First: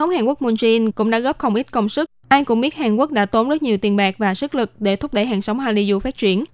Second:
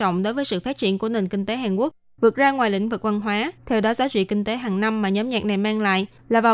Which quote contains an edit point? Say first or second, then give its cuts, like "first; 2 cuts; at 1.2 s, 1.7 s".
second; 1 cut; at 3.6 s